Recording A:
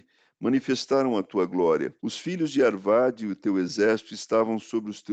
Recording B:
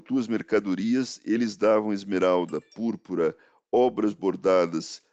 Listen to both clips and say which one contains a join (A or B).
A